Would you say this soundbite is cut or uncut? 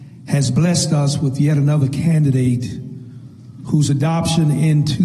uncut